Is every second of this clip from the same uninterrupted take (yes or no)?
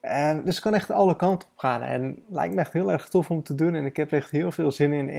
yes